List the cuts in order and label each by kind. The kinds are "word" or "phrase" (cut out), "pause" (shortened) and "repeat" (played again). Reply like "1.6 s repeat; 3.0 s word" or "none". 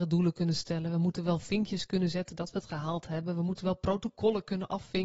none